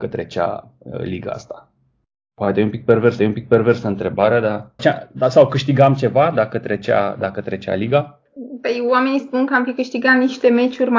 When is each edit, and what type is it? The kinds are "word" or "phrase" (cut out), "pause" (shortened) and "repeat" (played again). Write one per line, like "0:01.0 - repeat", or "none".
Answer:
0:03.2 - repeat
0:04.8 - word

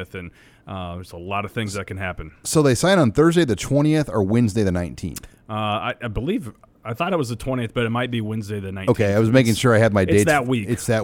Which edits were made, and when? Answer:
none

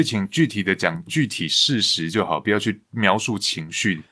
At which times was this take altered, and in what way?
0:02.8 - pause

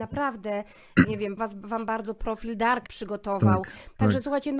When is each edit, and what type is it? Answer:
0:01.0 - word
0:01.4 - word
0:02.9 - phrase

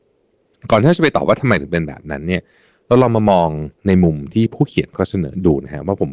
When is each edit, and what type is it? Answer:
none

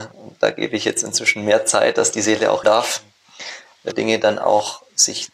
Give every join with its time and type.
0:02.6 - word
0:03.9 - word

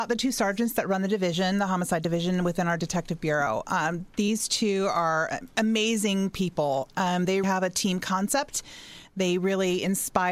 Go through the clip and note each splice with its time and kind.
0:07.4 - word

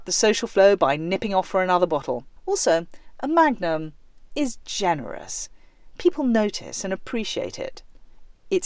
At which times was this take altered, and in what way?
0:02.4 - pause

